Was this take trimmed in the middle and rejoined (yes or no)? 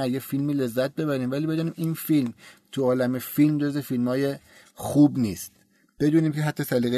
no